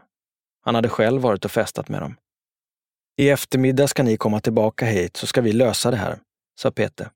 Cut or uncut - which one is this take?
uncut